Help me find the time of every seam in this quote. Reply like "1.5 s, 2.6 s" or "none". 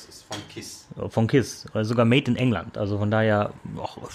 none